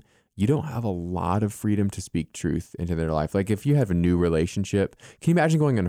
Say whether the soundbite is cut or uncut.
uncut